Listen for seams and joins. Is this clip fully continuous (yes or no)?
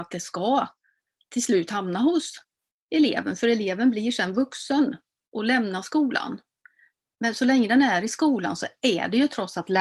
yes